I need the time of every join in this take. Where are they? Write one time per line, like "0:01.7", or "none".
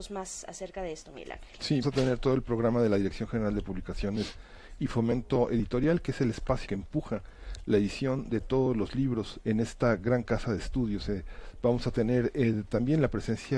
0:01.8
0:06.7
0:09.4